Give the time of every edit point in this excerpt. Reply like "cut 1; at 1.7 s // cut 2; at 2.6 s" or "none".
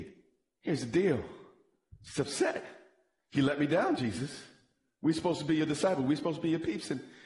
none